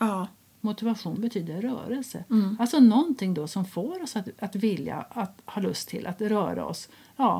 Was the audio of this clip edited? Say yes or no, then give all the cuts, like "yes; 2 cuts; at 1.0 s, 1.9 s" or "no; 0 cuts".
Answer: no; 0 cuts